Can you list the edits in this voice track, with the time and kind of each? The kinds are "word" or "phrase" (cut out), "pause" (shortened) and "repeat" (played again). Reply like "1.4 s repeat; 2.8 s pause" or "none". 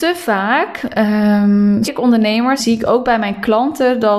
1.8 s word; 2.6 s word